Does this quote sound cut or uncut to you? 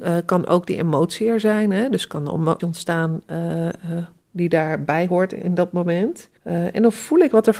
cut